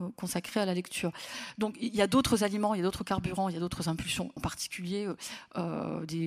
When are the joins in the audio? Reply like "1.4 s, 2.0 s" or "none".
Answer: 4.4 s

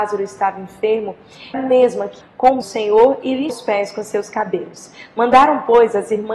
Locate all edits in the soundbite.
1.5 s, 2.2 s, 2.6 s, 3.5 s

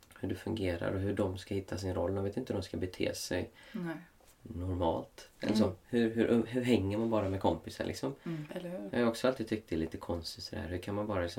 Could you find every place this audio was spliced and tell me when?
none

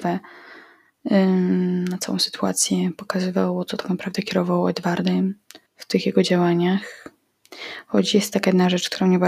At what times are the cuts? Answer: 5.7 s

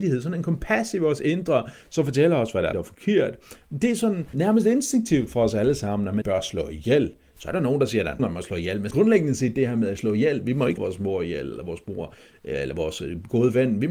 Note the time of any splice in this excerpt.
2.7 s, 4.3 s, 6.2 s, 8.2 s, 8.9 s, 10.8 s

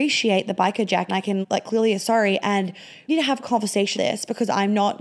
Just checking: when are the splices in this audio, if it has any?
1.1 s, 1.4 s, 2.0 s, 3.1 s, 4.0 s

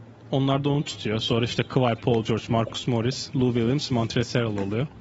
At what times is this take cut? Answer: none

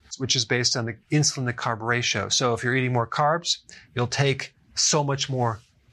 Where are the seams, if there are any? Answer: none

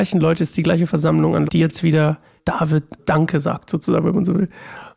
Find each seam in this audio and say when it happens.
1.5 s, 2.4 s, 3.0 s

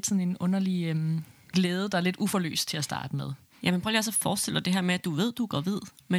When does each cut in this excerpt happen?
none

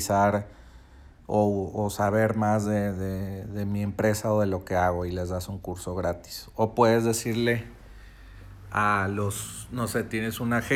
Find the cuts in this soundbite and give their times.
none

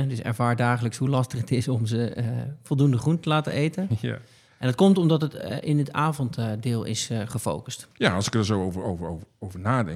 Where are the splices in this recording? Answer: 7.9 s

